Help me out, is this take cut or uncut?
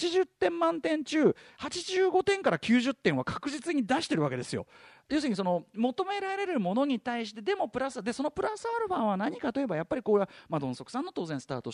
uncut